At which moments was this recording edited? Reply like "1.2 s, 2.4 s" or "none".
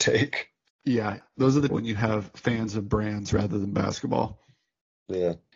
1.7 s